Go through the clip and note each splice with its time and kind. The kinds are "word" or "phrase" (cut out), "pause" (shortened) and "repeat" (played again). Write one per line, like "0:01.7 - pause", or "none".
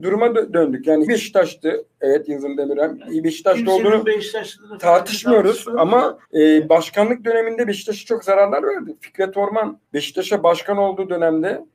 0:01.1 - phrase
0:06.2 - pause
0:09.9 - pause